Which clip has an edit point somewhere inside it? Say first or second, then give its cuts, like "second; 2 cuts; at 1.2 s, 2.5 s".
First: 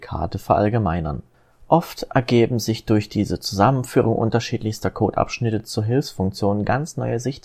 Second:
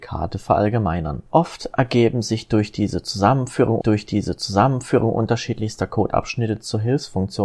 second; 2 cuts; at 1.3 s, 3.8 s